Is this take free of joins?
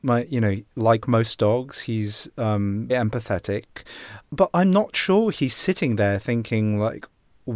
no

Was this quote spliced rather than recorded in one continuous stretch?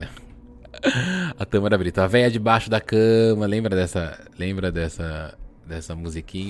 no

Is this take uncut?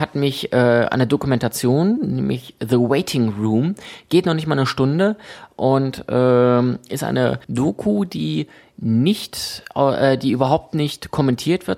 no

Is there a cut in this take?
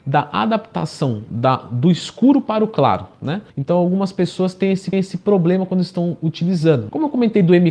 yes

